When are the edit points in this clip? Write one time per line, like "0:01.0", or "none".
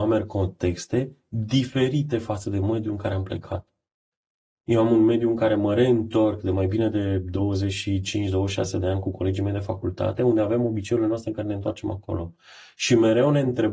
none